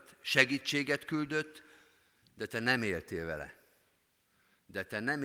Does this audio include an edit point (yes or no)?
no